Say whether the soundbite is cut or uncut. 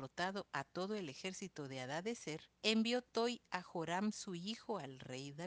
cut